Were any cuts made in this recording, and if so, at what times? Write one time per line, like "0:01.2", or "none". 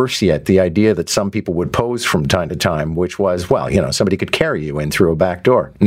none